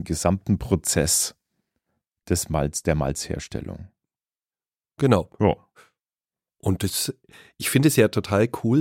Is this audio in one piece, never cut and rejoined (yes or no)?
yes